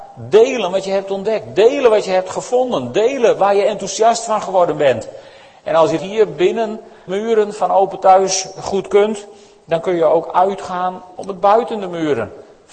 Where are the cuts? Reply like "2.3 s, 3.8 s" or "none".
6.0 s, 7.1 s